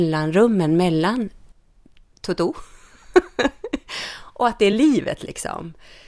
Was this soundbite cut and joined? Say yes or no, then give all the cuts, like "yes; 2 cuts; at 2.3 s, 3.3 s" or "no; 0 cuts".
no; 0 cuts